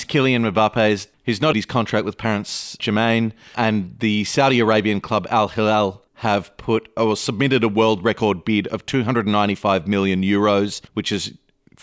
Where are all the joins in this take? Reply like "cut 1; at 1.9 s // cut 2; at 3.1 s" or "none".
cut 1; at 1.1 s // cut 2; at 1.5 s // cut 3; at 2.8 s // cut 4; at 3.5 s // cut 5; at 6.1 s // cut 6; at 7.0 s // cut 7; at 10.9 s